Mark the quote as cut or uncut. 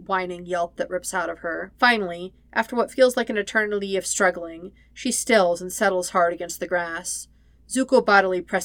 cut